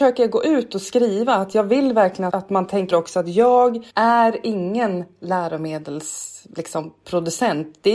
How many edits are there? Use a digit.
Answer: 3